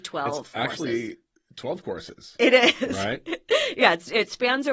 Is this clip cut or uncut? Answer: uncut